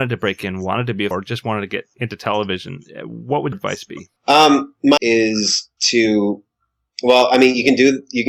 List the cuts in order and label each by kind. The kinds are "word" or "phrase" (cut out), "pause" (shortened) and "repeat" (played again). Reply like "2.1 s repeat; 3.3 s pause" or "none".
1.1 s word; 1.9 s word; 3.5 s word; 4.2 s pause; 5.0 s word; 5.8 s pause